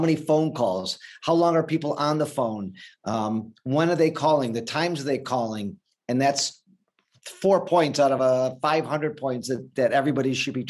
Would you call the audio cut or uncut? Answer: uncut